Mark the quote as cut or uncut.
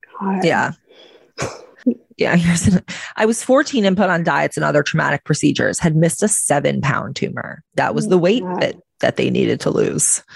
cut